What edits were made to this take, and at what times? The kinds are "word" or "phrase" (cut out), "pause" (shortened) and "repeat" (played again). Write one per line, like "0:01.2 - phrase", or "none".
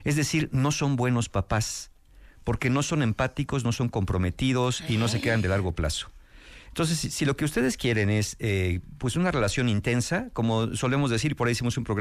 none